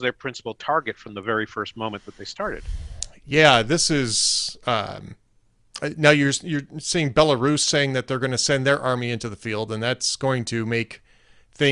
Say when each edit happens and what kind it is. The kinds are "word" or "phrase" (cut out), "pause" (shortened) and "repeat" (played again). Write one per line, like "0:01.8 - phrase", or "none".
none